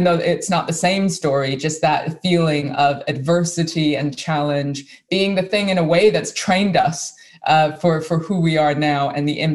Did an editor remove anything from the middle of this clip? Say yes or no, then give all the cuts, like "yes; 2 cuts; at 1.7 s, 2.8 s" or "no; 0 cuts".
no; 0 cuts